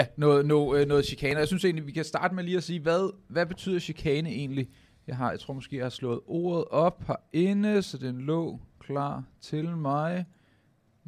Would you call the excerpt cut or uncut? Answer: uncut